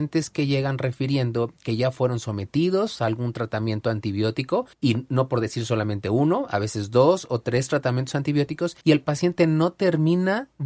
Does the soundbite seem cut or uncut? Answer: cut